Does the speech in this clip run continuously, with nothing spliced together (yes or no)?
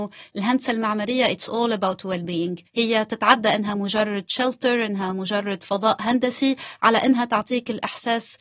no